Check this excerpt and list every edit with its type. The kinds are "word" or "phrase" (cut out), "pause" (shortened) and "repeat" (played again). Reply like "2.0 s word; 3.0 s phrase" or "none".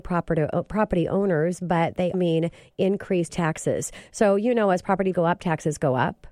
2.1 s word; 3.3 s word; 5.1 s word